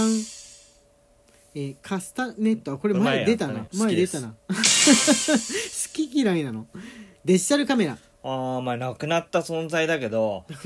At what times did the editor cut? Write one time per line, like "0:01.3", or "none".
0:03.7